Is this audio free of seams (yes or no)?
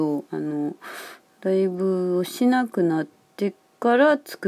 yes